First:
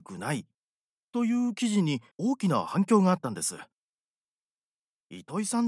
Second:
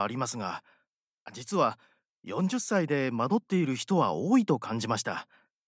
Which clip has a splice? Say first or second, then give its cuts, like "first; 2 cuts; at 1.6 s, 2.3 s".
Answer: first; 1 cut; at 2.1 s